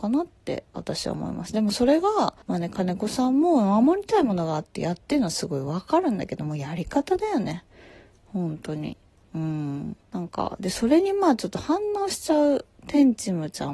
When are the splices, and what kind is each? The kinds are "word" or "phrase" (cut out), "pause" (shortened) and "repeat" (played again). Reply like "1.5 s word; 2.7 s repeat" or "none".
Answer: 2.4 s pause; 10.0 s pause